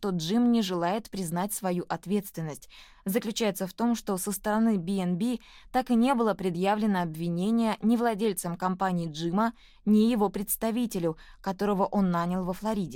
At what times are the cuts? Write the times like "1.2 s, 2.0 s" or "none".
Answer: none